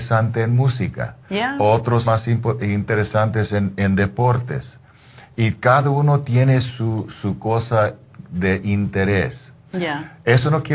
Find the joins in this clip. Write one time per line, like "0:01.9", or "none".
0:01.2
0:02.0